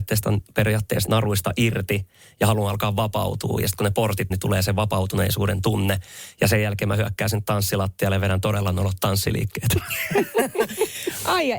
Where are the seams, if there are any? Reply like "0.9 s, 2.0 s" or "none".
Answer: 1.1 s, 4.3 s